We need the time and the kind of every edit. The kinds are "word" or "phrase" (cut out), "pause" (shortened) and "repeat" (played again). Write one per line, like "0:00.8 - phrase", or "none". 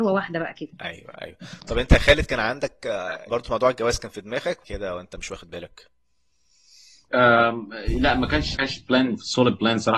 0:01.1 - word
0:03.3 - word
0:04.6 - phrase
0:08.5 - word